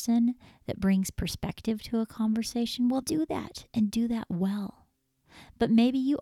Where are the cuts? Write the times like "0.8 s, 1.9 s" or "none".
3.0 s